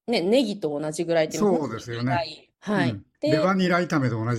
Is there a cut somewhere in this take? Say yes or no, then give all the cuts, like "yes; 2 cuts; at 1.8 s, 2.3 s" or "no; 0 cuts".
yes; 2 cuts; at 2.5 s, 3.1 s